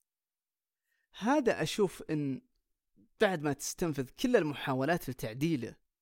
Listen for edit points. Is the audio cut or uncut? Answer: uncut